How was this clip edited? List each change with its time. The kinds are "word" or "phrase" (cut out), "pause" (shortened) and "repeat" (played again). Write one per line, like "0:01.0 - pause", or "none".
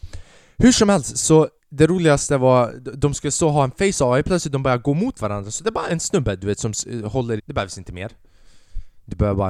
0:01.6 - pause
0:07.4 - phrase